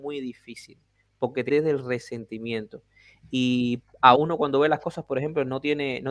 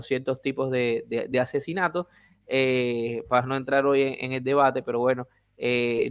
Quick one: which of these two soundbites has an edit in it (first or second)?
first